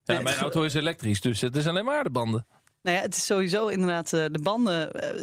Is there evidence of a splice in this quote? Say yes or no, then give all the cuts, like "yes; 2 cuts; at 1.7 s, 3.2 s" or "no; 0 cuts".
no; 0 cuts